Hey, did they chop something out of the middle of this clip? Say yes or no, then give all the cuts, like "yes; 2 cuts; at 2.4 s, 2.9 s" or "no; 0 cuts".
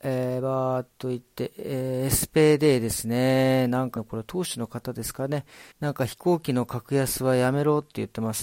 yes; 2 cuts; at 4.0 s, 5.7 s